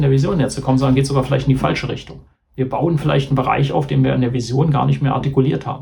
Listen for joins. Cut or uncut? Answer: uncut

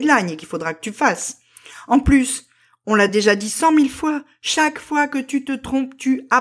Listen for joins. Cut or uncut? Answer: uncut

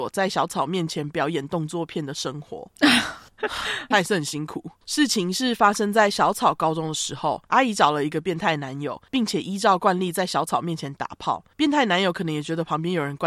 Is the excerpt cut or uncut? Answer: cut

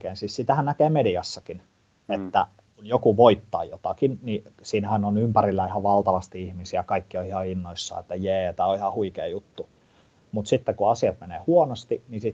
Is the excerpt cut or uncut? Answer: uncut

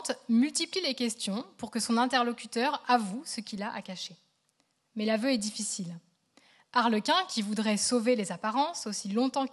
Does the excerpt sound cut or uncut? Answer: uncut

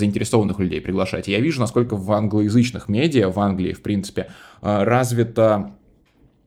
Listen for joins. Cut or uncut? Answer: uncut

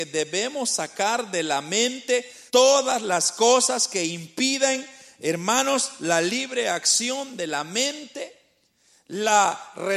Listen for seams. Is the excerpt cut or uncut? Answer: cut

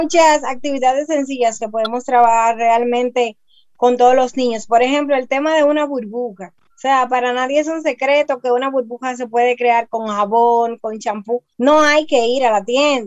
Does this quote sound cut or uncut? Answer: cut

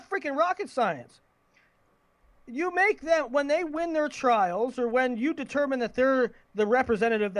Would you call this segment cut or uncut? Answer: uncut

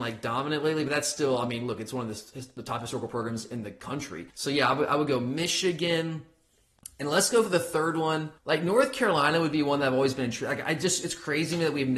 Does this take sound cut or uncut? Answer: cut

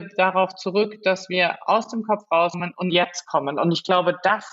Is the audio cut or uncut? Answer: cut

